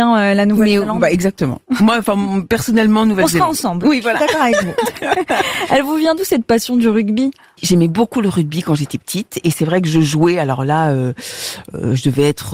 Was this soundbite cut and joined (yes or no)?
no